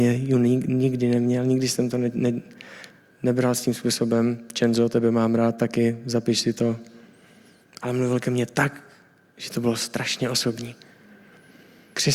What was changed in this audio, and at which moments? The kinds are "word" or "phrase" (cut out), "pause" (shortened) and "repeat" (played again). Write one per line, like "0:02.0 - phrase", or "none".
none